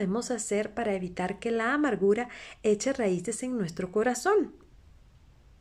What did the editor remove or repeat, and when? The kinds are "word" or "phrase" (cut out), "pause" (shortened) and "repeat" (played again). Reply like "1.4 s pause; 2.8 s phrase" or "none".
none